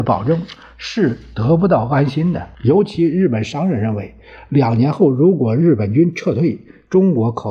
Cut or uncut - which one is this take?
cut